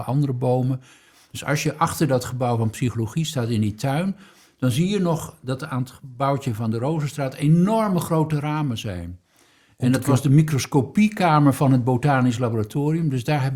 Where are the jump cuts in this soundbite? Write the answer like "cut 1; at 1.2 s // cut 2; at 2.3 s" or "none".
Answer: none